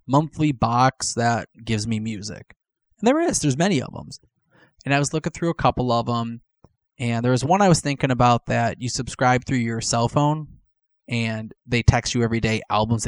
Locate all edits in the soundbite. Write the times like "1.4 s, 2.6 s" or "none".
none